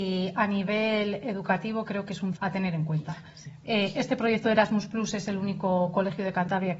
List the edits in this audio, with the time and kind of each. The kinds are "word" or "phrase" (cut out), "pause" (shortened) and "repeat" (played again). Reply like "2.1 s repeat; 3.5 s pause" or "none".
2.4 s word